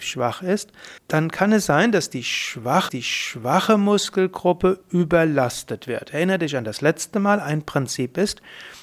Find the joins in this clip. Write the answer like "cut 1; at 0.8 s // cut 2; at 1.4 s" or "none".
cut 1; at 1.0 s // cut 2; at 2.9 s